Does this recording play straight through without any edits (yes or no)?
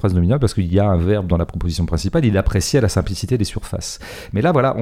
yes